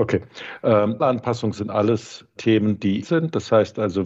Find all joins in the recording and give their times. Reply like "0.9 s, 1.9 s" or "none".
1.0 s, 2.4 s, 3.0 s